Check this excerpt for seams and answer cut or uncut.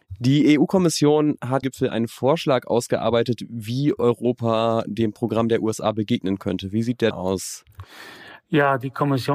cut